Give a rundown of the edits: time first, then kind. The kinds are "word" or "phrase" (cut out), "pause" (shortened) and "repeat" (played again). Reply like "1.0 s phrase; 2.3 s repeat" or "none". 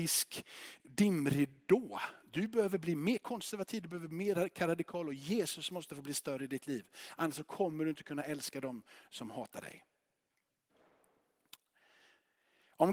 none